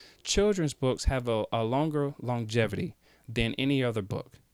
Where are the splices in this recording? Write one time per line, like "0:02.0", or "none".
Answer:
none